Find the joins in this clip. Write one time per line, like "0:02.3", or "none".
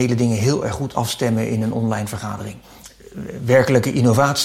none

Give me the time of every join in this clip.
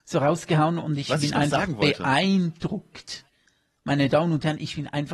none

